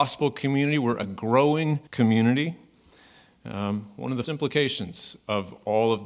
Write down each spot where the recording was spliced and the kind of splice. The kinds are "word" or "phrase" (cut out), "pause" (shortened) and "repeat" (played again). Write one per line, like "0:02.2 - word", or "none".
0:01.9 - pause
0:04.2 - word